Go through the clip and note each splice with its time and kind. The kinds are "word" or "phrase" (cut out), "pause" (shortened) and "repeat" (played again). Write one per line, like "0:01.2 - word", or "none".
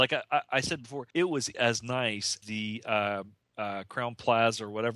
0:01.1 - pause
0:01.5 - word
0:02.4 - word